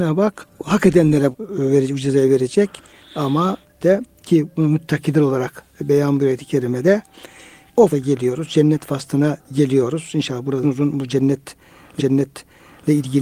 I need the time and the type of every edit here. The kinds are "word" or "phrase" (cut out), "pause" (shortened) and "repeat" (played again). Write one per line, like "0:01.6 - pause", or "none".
0:01.3 - word
0:03.8 - phrase
0:07.9 - word
0:10.6 - phrase
0:12.0 - repeat

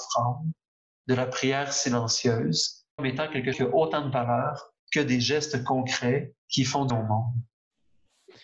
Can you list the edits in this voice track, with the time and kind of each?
0:03.0 - word
0:03.5 - word
0:04.8 - pause
0:06.4 - pause
0:06.9 - word

